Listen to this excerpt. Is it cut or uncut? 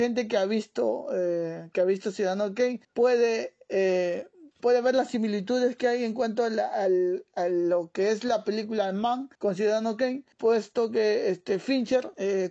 cut